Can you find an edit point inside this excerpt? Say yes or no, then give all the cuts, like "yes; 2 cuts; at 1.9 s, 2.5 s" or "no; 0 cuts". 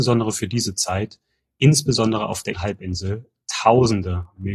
yes; 1 cut; at 2.5 s